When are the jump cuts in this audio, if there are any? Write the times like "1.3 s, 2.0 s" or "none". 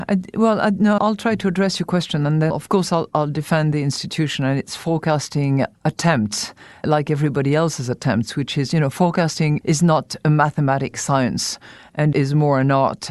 1.0 s, 2.5 s, 5.7 s, 6.8 s, 9.6 s, 12.1 s